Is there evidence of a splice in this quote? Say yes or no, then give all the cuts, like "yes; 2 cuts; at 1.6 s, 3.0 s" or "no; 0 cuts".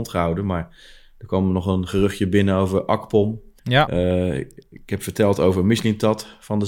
yes; 1 cut; at 3.6 s